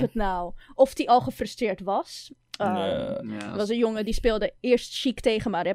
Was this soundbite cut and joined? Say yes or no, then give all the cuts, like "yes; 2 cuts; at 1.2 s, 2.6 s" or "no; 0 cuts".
no; 0 cuts